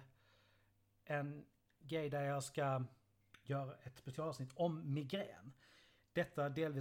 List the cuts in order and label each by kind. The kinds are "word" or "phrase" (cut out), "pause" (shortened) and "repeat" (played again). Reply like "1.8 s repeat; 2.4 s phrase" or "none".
none